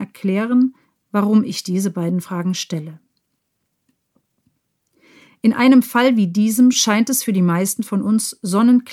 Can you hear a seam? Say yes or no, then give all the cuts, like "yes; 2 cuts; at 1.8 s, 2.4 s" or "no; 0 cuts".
no; 0 cuts